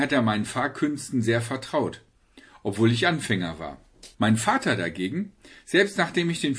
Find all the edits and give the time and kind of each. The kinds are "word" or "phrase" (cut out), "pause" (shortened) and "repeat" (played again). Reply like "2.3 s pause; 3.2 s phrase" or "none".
4.1 s pause